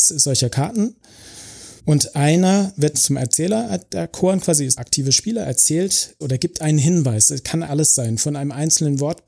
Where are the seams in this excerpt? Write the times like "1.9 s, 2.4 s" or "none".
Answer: 1.8 s, 2.9 s, 4.8 s, 6.2 s, 7.7 s